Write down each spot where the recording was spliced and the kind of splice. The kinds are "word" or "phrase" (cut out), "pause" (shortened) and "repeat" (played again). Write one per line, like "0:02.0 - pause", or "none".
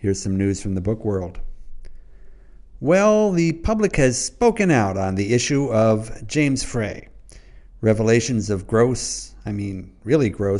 none